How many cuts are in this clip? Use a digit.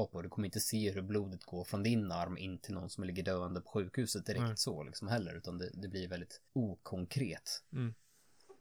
1